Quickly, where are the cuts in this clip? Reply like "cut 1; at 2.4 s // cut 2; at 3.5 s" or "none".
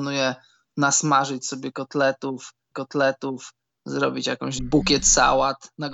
cut 1; at 2.7 s // cut 2; at 4.6 s